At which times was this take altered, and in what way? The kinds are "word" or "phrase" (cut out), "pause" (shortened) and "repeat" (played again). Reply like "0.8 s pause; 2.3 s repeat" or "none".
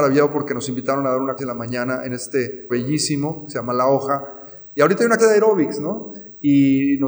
1.4 s word; 2.7 s word; 5.2 s word